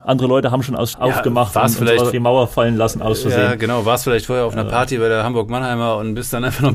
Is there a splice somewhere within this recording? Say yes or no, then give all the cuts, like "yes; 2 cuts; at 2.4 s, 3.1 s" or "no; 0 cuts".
yes; 2 cuts; at 0.9 s, 2.1 s